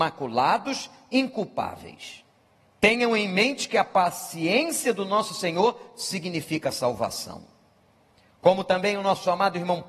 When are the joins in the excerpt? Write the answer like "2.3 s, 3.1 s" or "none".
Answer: 2.6 s